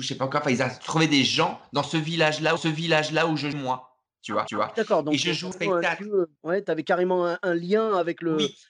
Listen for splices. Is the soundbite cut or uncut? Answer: cut